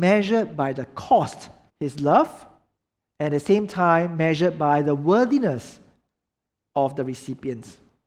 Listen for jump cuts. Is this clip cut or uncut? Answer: cut